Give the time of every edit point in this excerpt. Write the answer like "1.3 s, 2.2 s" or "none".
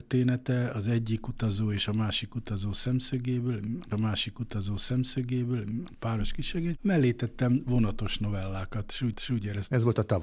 3.9 s, 9.1 s

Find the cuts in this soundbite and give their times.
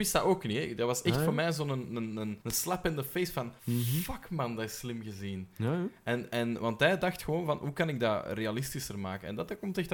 2.4 s, 3.6 s

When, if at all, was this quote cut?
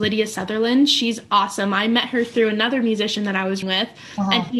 3.6 s

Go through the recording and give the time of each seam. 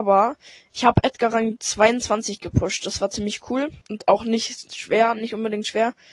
3.8 s

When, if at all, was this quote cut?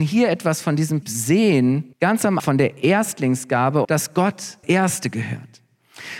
1.0 s, 1.9 s, 2.4 s, 3.8 s, 4.6 s

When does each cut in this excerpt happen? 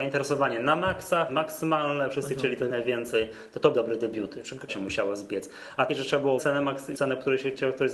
1.3 s, 2.7 s, 3.7 s, 4.7 s, 5.9 s, 6.4 s, 6.9 s

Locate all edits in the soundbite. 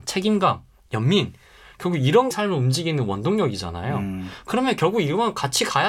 2.3 s

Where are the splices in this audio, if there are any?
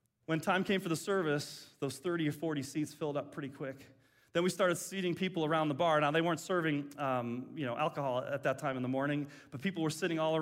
none

